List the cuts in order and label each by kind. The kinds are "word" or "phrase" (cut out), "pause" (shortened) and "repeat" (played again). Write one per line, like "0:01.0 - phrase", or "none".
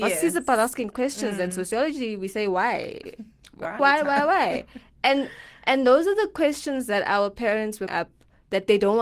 0:03.8 - word
0:07.9 - phrase